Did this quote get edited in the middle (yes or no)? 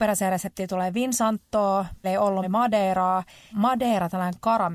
yes